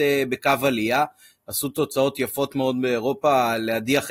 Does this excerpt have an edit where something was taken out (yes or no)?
no